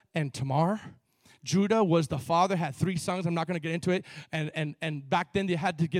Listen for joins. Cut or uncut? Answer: uncut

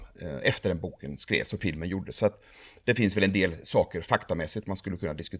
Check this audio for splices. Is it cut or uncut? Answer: uncut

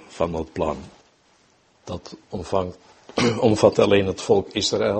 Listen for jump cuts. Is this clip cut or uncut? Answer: cut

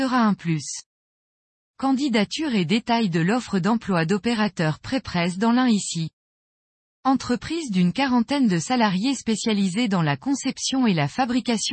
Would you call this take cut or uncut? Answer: uncut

